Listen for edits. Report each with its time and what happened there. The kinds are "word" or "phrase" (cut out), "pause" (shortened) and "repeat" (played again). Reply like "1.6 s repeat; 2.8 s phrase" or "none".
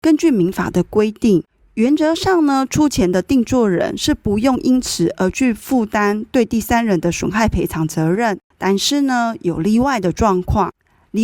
8.4 s pause